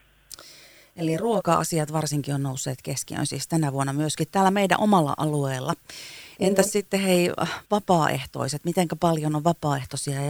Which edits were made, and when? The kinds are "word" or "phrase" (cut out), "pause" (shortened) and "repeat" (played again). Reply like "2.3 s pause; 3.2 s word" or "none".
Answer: 7.6 s pause